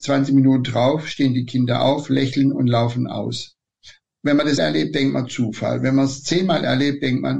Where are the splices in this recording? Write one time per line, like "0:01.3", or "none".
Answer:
0:04.6